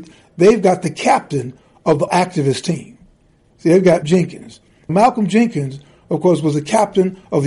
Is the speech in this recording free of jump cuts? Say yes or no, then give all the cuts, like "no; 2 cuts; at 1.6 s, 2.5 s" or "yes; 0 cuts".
no; 3 cuts; at 2.1 s, 4.0 s, 4.9 s